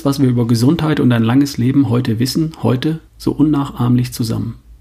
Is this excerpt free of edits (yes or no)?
no